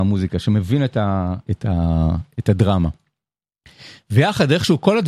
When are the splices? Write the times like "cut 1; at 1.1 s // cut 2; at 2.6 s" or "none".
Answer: none

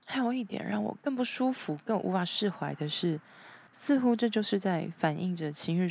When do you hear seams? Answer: cut 1; at 3.7 s

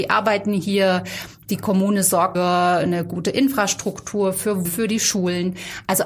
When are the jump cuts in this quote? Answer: cut 1; at 2.3 s // cut 2; at 4.6 s

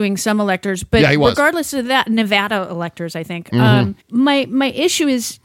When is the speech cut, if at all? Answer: cut 1; at 4.0 s

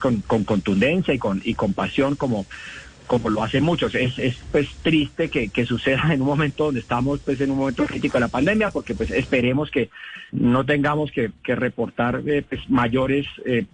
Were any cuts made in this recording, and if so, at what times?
cut 1; at 10.3 s

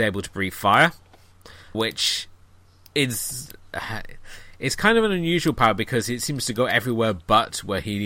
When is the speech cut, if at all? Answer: cut 1; at 1.7 s

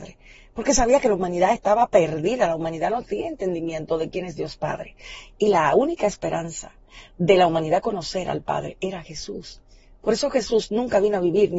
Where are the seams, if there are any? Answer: none

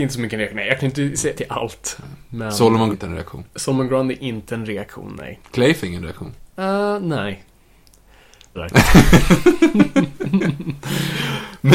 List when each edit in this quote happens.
cut 1; at 1.3 s // cut 2; at 2.9 s // cut 3; at 3.5 s // cut 4; at 5.8 s // cut 5; at 6.5 s // cut 6; at 8.5 s

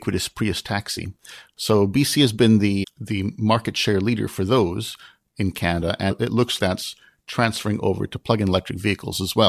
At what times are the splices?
cut 1; at 2.8 s // cut 2; at 6.1 s // cut 3; at 6.6 s

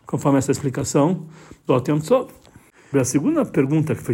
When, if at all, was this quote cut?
cut 1; at 1.7 s // cut 2; at 2.9 s

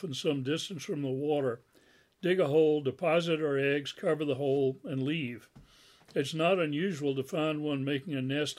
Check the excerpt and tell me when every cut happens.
none

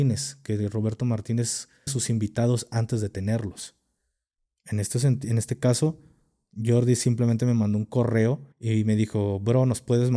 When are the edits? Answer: cut 1; at 1.9 s // cut 2; at 8.5 s

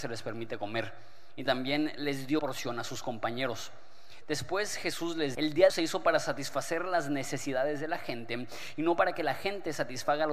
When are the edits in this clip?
cut 1; at 2.4 s // cut 2; at 5.3 s // cut 3; at 5.7 s

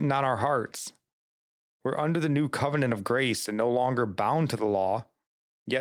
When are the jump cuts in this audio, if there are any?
none

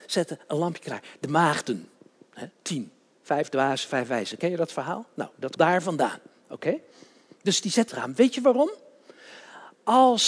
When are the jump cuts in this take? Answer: cut 1; at 2.5 s // cut 2; at 5.6 s // cut 3; at 7.9 s

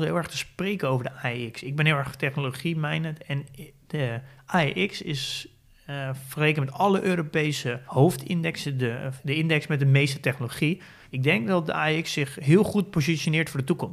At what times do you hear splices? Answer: none

